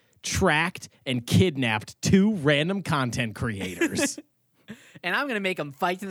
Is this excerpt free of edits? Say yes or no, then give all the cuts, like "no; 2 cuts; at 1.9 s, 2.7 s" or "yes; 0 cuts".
yes; 0 cuts